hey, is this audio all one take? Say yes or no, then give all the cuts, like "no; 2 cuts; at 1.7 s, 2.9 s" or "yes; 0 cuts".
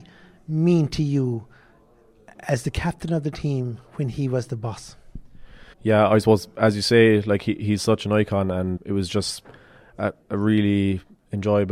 no; 2 cuts; at 5.7 s, 8.8 s